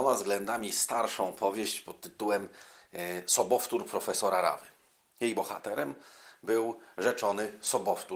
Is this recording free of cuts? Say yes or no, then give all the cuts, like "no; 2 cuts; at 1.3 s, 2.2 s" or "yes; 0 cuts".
yes; 0 cuts